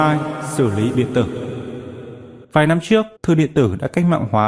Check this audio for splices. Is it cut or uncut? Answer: cut